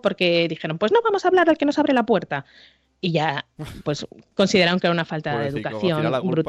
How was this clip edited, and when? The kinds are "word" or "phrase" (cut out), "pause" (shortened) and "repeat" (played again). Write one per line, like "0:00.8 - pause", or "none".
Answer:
none